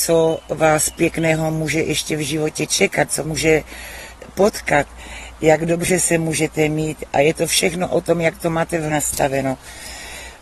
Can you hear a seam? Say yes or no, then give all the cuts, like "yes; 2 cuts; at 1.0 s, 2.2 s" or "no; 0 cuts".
yes; 2 cuts; at 3.2 s, 8.9 s